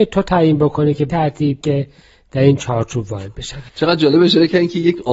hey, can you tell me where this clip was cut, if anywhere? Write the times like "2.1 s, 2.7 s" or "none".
1.1 s, 1.6 s, 3.7 s